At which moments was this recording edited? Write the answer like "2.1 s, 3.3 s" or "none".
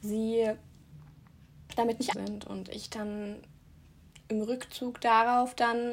2.1 s